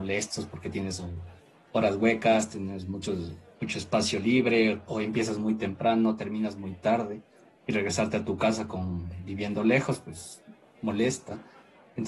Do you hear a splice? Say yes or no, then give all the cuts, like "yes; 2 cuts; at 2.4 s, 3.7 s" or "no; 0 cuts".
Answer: no; 0 cuts